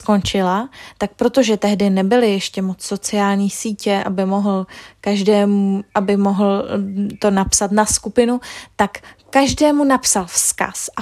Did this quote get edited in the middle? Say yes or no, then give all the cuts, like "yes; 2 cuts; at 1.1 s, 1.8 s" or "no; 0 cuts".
no; 0 cuts